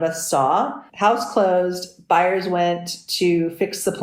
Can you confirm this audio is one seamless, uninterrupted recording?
yes; 0 cuts

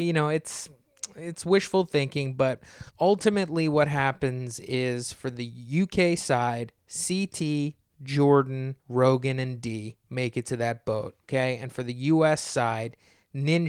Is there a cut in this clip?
yes; 3 cuts; at 2.9 s, 8.8 s, 11.2 s

